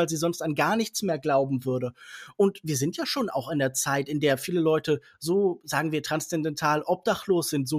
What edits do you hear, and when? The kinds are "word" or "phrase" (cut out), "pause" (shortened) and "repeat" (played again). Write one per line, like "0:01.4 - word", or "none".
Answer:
none